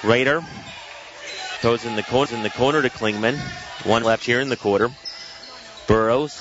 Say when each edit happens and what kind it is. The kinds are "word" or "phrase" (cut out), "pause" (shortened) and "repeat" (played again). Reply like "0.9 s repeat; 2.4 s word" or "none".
1.6 s word; 2.3 s repeat; 4.0 s word